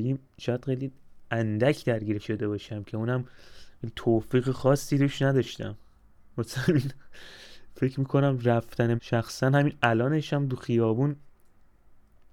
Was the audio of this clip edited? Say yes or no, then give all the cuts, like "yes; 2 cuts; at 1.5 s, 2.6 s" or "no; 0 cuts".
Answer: yes; 2 cuts; at 2.2 s, 9.0 s